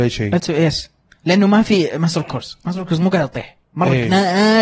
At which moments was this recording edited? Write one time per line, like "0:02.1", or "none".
none